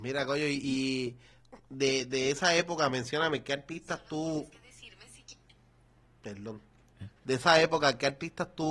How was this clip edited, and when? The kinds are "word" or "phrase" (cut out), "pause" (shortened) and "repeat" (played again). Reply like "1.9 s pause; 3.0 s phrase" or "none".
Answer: 7.2 s pause